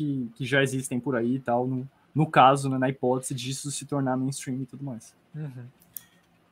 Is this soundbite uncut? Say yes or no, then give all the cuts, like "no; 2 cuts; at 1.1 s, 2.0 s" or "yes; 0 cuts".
no; 2 cuts; at 2.0 s, 5.2 s